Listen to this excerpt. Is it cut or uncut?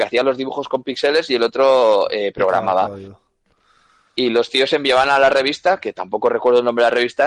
uncut